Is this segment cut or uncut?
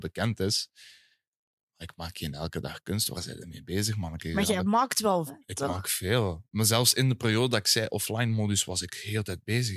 cut